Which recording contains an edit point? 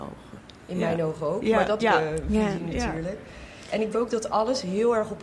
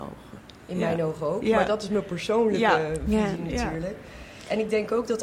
first; 2 cuts; at 1.8 s, 3.9 s

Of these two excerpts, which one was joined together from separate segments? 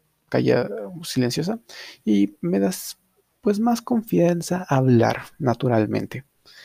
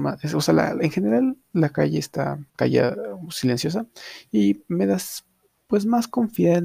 second; 1 cut; at 2.5 s

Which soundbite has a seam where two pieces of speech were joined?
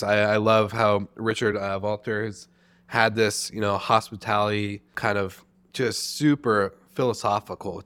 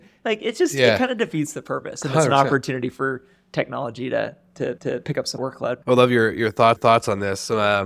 second; 4 cuts; at 4.8 s, 5.4 s, 5.8 s, 6.8 s

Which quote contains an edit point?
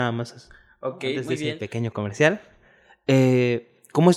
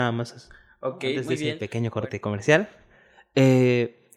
first; 1 cut; at 1.9 s

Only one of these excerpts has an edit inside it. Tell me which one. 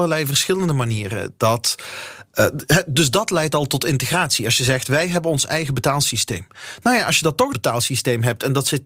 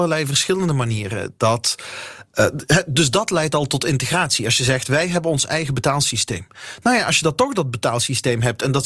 first; 1 cut; at 7.5 s

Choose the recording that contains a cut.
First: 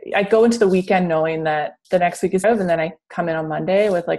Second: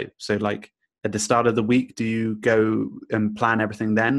first; 2 cuts; at 1.8 s, 2.4 s

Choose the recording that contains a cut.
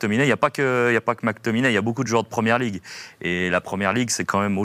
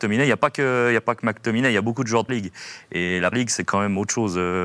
second; 2 cuts; at 2.3 s, 3.3 s

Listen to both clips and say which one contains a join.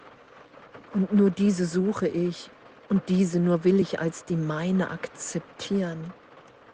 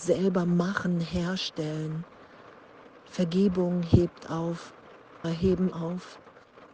second; 2 cuts; at 5.2 s, 5.7 s

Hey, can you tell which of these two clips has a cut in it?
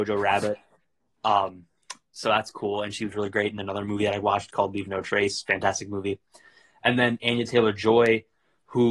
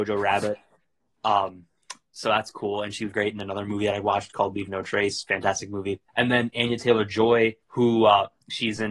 second; 3 cuts; at 3.1 s, 6.1 s, 7.6 s

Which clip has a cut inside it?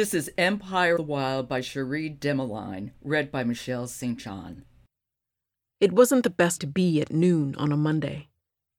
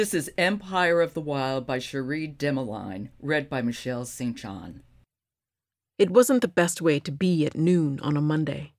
first; 2 cuts; at 1.0 s, 6.6 s

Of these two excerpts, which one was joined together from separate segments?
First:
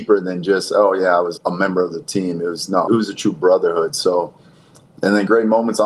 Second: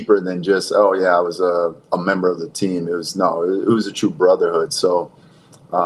first; 3 cuts; at 1.4 s, 2.9 s, 4.9 s

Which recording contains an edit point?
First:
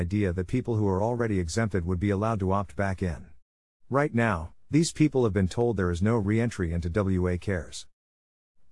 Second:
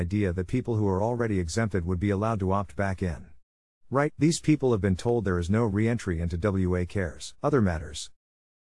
second; 2 cuts; at 4.1 s, 7.4 s

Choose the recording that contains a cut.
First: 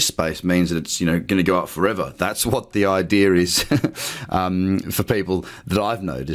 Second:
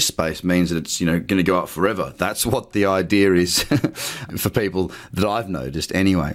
second; 1 cut; at 4.3 s

